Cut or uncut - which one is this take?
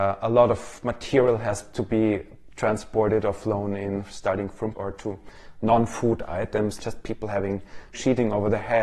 cut